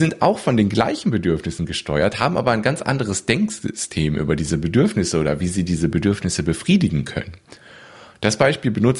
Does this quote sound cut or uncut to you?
uncut